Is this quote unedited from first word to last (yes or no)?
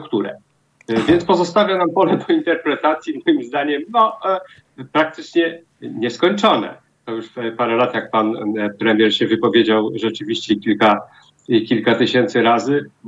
yes